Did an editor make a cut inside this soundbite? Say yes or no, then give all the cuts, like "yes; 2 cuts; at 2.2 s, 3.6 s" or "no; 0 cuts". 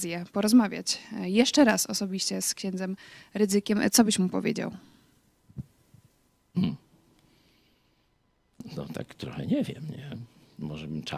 no; 0 cuts